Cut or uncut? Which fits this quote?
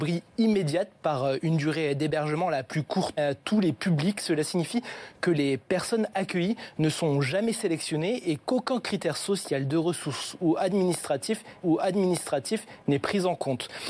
cut